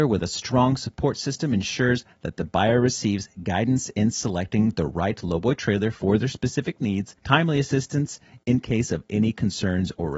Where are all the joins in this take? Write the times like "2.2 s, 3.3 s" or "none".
7.2 s